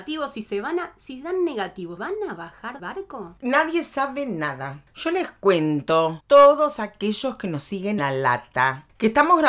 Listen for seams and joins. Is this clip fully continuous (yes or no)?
no